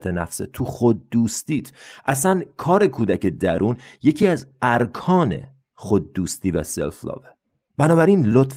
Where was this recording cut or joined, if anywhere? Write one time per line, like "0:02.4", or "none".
none